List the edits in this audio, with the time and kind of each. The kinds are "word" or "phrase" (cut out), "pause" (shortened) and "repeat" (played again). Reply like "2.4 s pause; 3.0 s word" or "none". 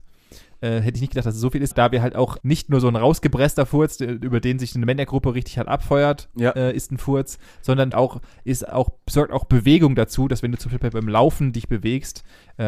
1.7 s word; 2.4 s word; 7.9 s word